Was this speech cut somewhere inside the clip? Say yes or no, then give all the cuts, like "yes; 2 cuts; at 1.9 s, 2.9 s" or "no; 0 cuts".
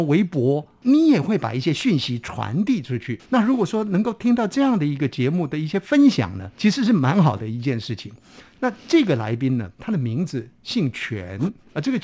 yes; 2 cuts; at 3.2 s, 6.5 s